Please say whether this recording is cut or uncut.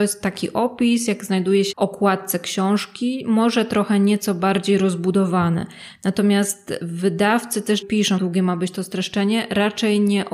cut